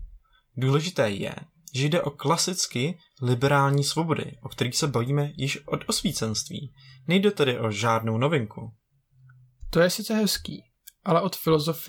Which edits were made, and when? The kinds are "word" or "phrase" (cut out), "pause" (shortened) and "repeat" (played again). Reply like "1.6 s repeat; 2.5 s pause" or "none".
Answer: none